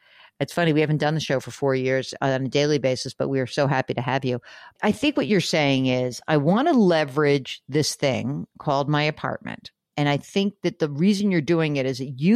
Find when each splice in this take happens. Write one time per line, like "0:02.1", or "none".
none